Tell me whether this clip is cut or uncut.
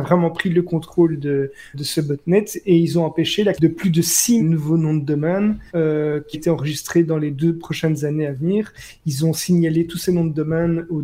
cut